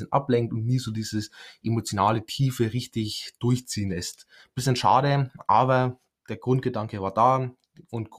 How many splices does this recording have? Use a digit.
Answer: 0